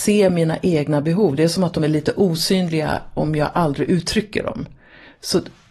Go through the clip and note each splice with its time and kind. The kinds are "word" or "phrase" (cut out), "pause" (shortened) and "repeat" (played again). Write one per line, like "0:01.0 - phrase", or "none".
none